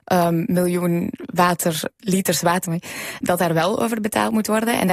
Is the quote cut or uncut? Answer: cut